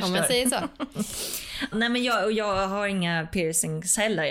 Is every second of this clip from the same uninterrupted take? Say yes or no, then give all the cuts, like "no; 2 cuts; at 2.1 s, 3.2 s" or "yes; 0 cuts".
no; 1 cut; at 1.7 s